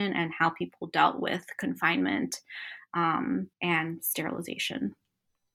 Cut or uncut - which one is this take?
cut